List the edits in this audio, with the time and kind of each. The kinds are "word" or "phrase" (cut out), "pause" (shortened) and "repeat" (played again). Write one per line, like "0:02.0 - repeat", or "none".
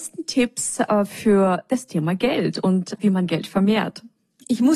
0:03.0 - word